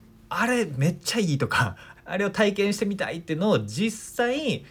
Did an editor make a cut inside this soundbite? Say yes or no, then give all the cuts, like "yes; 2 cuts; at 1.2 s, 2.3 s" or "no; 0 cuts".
yes; 1 cut; at 2.0 s